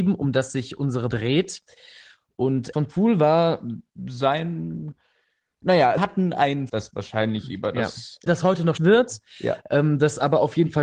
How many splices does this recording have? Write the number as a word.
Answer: six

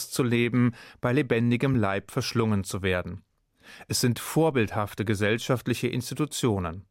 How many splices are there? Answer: zero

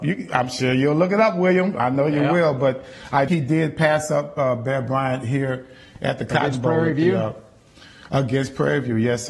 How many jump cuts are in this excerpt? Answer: one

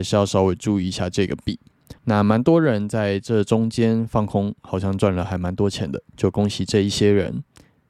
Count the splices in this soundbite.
one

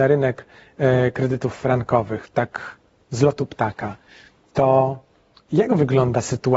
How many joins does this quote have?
zero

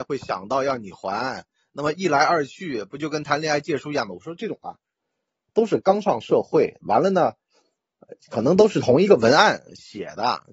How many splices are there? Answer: zero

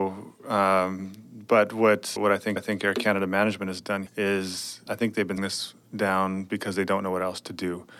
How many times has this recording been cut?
six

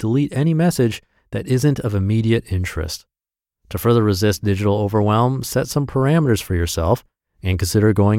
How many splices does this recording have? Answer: zero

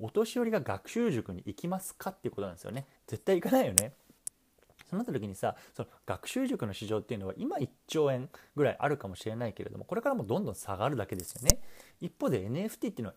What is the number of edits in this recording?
one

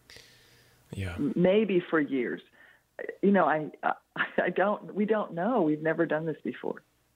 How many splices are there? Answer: zero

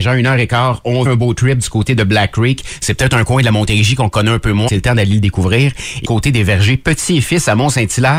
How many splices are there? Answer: three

